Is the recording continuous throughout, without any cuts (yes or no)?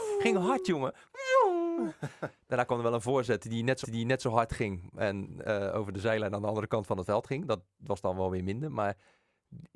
no